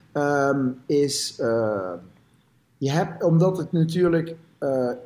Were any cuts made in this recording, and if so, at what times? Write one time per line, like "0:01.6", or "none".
none